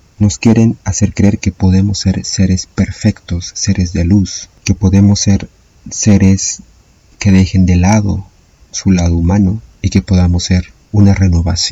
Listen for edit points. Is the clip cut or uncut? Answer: uncut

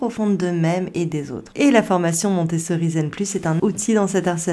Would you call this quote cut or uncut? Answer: cut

